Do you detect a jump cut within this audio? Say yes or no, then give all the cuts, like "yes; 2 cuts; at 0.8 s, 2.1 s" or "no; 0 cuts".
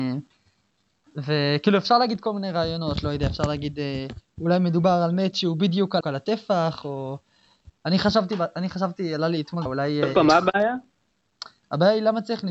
yes; 2 cuts; at 6.0 s, 9.7 s